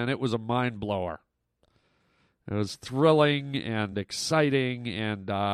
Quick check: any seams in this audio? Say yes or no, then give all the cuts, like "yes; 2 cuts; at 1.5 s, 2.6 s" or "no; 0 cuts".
no; 0 cuts